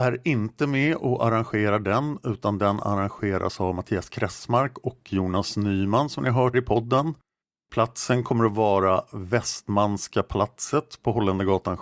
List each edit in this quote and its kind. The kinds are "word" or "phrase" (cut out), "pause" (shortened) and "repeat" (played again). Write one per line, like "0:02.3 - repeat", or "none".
0:06.5 - word